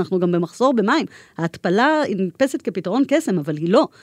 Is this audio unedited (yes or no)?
yes